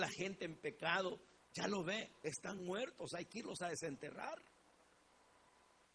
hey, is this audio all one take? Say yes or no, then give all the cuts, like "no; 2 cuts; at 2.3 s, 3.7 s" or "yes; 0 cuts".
yes; 0 cuts